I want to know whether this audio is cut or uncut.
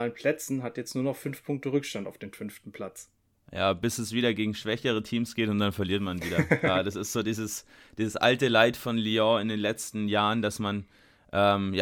uncut